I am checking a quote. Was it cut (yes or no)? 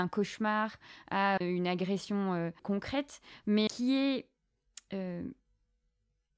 yes